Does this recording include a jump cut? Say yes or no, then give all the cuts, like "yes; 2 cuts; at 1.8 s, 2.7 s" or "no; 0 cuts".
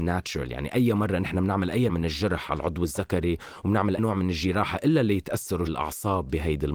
yes; 3 cuts; at 1.9 s, 4.0 s, 5.7 s